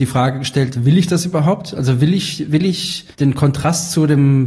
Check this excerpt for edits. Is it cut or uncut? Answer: cut